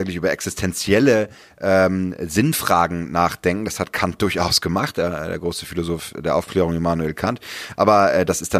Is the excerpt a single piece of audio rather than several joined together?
yes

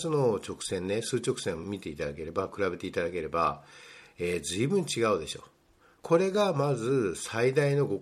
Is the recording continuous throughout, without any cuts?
yes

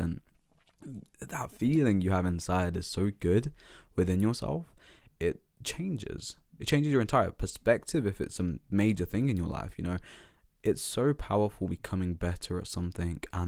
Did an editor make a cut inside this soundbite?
no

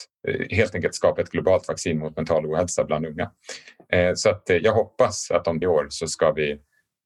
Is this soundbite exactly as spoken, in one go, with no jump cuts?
no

